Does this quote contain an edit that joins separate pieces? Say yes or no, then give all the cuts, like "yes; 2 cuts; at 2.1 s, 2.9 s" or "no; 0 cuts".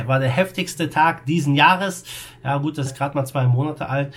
yes; 1 cut; at 2.9 s